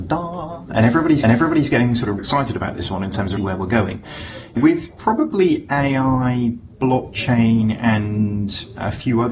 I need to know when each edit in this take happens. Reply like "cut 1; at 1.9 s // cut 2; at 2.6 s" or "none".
cut 1; at 1.2 s // cut 2; at 2.2 s // cut 3; at 3.4 s // cut 4; at 4.6 s